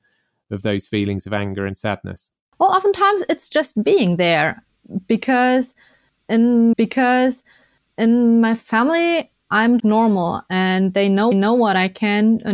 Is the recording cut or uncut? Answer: cut